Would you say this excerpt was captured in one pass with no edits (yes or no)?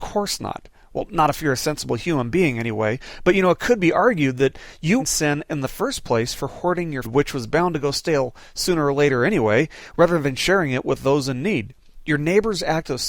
no